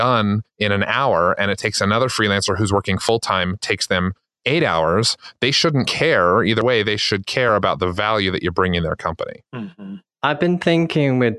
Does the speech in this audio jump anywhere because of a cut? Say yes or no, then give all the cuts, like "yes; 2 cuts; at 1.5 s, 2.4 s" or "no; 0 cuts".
no; 0 cuts